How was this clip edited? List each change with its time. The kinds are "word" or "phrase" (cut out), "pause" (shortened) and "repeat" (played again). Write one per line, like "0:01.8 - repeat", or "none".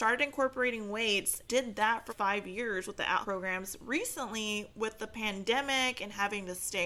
0:01.5 - word
0:02.1 - word
0:03.2 - word